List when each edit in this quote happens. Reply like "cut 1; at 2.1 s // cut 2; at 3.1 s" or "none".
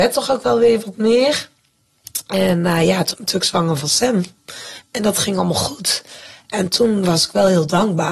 cut 1; at 3.1 s